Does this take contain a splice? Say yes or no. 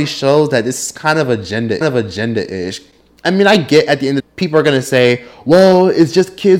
yes